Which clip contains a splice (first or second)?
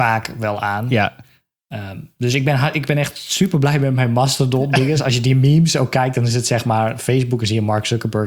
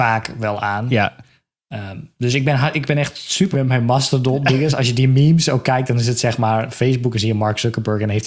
second